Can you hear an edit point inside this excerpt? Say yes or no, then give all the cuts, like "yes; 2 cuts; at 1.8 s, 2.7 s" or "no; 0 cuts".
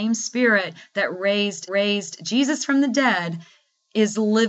yes; 1 cut; at 1.7 s